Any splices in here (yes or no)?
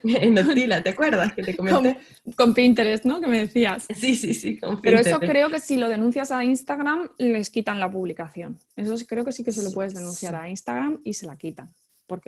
no